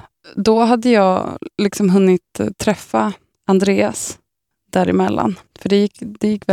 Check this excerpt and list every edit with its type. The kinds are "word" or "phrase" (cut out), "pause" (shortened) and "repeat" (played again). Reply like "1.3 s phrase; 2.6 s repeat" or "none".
1.5 s pause; 3.3 s pause; 5.5 s pause